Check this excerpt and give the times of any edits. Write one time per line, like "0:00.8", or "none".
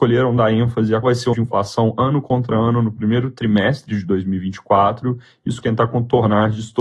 0:01.0
0:01.3
0:05.6

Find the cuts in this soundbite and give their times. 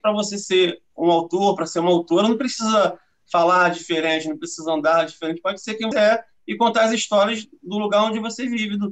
0:05.9

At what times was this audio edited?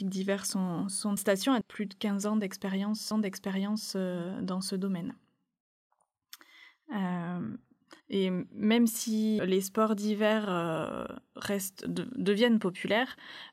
0:01.2
0:01.6
0:03.1
0:08.0
0:09.4
0:11.8

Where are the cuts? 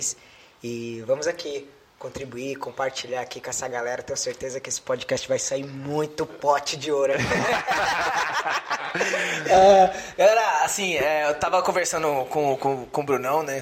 none

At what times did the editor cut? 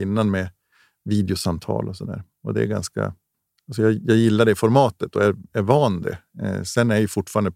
0:03.3

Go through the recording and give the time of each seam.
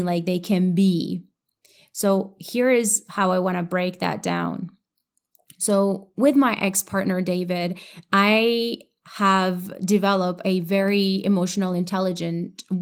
none

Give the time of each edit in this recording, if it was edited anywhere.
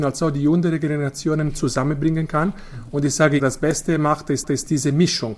0:03.4
0:04.4

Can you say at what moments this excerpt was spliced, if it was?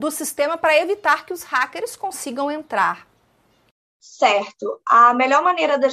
none

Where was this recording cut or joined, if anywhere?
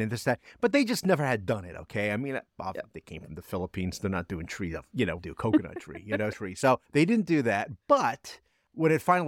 0:05.2
0:06.3
0:06.8

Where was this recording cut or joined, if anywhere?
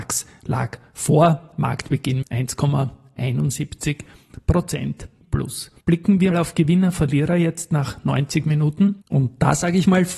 0:02.2
0:05.2
0:05.8
0:06.3
0:09.0

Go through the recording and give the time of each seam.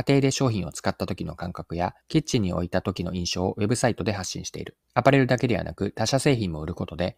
0:02.0
0:04.8

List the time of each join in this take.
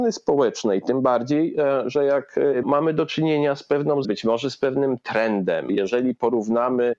0:02.6
0:04.0

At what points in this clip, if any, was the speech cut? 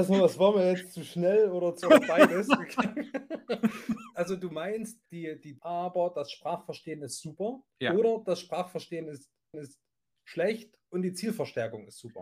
0:01.8
0:05.1
0:05.6
0:07.7
0:09.5

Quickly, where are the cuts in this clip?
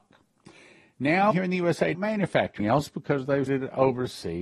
0:01.3
0:01.9
0:02.6
0:03.5

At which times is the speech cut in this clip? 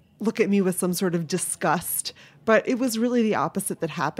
none

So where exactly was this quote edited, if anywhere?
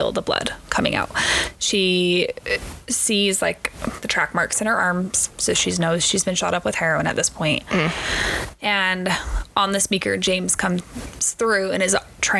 none

